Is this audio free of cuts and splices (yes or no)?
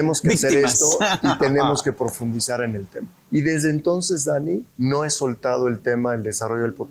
no